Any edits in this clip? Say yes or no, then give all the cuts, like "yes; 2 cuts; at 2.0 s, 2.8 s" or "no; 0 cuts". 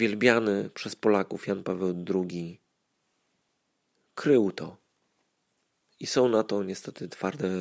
no; 0 cuts